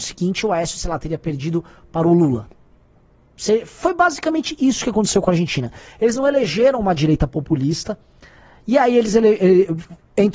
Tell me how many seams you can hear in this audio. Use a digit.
0